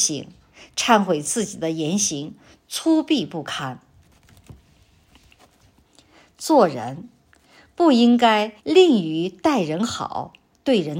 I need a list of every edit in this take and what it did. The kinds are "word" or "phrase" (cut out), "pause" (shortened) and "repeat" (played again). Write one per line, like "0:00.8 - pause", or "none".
0:08.6 - pause